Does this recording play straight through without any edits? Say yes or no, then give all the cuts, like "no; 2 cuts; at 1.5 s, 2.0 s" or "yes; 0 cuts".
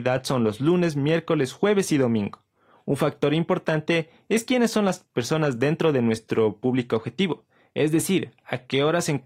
yes; 0 cuts